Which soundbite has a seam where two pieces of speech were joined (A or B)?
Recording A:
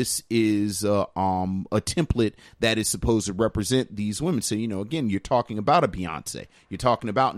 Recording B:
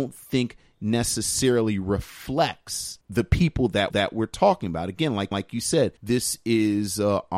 B